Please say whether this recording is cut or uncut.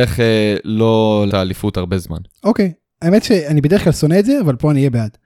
cut